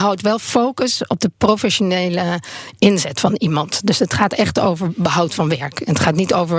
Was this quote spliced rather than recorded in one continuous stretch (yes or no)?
no